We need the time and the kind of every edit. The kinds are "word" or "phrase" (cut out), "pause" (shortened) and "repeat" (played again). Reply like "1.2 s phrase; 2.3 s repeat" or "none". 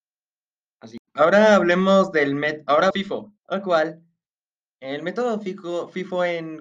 1.1 s pause; 2.9 s phrase; 3.4 s pause